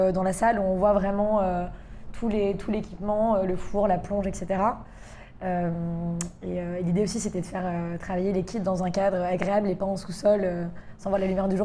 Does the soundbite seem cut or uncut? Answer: uncut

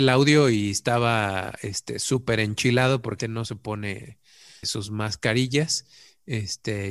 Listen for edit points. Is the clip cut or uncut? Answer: cut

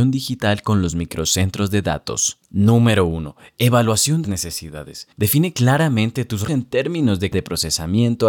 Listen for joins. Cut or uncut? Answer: cut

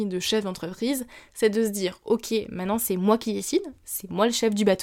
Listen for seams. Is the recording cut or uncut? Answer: uncut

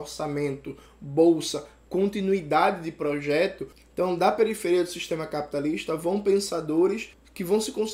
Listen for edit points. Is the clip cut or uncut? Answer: uncut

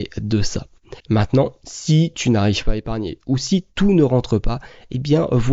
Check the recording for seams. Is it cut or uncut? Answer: cut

